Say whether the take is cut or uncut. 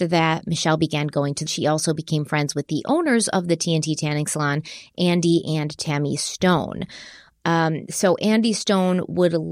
cut